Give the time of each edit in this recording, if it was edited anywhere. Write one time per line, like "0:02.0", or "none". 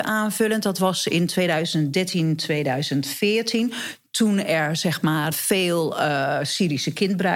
0:05.3